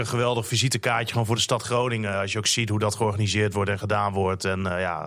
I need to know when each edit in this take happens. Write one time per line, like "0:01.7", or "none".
none